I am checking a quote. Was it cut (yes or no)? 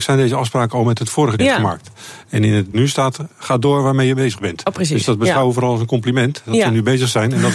yes